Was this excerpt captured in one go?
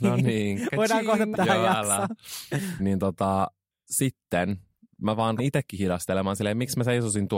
no; 3 cuts; at 1.3 s, 2.8 s, 5.4 s

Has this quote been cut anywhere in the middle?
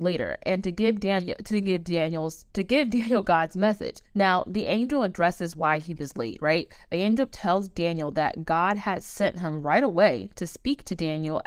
yes; 2 cuts; at 2.5 s, 4.1 s

